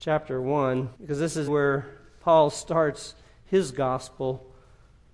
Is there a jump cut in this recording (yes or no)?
yes